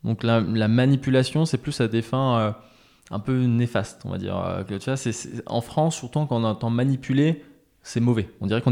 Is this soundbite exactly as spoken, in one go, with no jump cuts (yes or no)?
yes